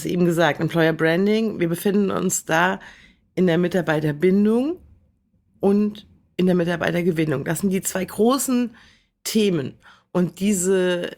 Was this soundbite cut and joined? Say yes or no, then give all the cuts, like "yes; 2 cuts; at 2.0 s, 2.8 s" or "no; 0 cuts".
no; 0 cuts